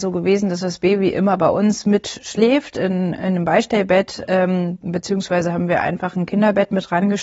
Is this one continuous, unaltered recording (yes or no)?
yes